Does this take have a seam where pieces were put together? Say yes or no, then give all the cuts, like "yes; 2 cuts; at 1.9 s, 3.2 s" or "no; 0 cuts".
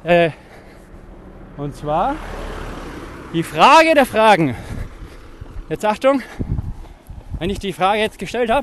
no; 0 cuts